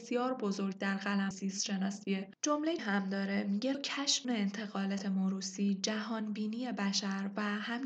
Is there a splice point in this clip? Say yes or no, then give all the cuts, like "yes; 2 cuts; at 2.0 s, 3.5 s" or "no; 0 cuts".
yes; 5 cuts; at 1.3 s, 2.8 s, 3.7 s, 4.2 s, 5.0 s